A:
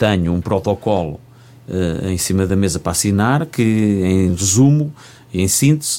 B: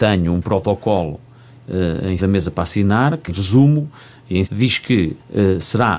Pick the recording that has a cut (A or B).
B